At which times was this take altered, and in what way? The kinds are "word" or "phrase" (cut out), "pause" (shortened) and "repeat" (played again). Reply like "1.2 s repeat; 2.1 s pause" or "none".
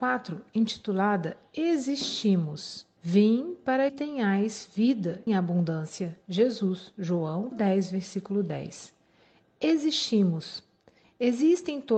3.0 s pause; 3.9 s word; 5.3 s phrase; 7.5 s word